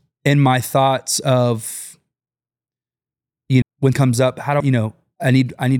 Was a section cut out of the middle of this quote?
yes; 3 cuts; at 3.6 s, 3.9 s, 4.6 s

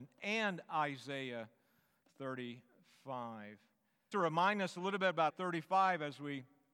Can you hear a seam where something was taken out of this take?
yes; 2 cuts; at 4.1 s, 5.3 s

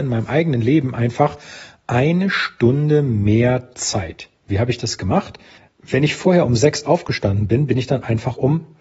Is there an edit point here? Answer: yes; 2 cuts; at 4.4 s, 5.6 s

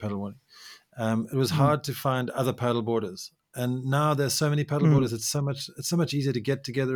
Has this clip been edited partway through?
no; 0 cuts

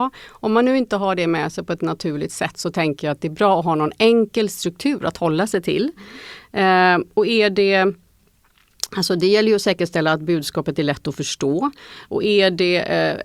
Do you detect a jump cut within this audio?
no; 0 cuts

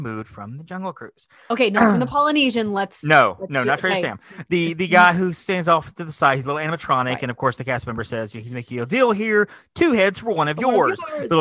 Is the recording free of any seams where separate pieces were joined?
yes; 0 cuts

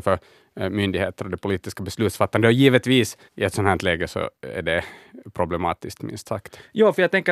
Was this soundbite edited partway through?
yes; 1 cut; at 3.3 s

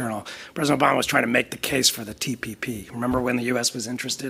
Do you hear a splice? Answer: no; 0 cuts

